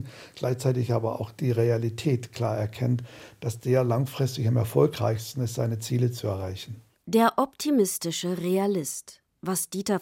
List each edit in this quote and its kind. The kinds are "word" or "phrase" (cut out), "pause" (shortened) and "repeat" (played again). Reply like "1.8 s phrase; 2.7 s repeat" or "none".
7.0 s pause